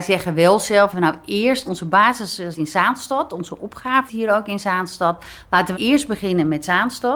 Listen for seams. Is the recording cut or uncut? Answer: cut